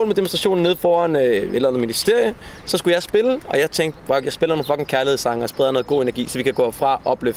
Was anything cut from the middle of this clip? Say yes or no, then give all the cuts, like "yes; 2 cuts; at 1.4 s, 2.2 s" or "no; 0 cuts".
no; 0 cuts